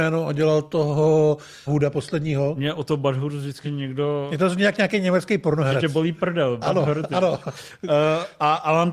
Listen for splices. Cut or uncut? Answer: cut